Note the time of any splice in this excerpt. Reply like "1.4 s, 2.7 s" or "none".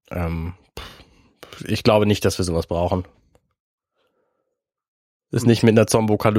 none